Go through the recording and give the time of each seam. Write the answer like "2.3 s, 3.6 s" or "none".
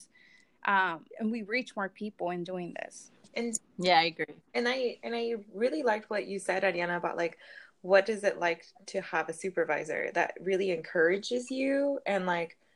1.1 s